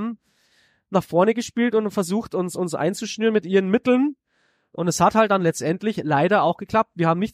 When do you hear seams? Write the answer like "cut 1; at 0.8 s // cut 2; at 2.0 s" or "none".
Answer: none